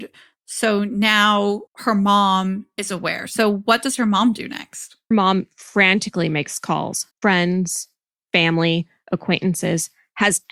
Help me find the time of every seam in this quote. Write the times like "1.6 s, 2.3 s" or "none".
1.7 s, 5.1 s, 7.1 s